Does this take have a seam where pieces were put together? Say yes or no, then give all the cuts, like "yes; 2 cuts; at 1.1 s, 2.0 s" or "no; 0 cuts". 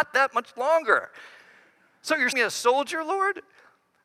yes; 1 cut; at 2.3 s